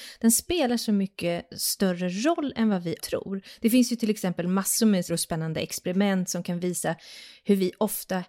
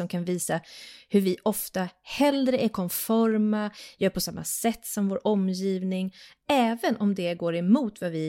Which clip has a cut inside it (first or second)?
first